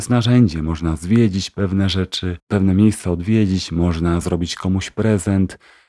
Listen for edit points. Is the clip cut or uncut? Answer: uncut